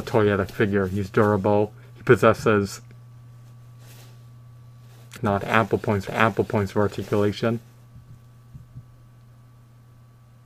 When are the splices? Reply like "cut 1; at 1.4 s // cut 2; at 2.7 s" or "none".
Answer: cut 1; at 1.8 s // cut 2; at 5.2 s // cut 3; at 6.1 s